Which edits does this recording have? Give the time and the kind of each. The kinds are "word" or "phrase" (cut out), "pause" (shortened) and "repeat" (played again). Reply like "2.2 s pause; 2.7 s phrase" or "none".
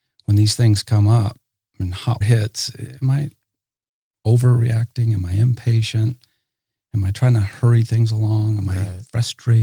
2.2 s word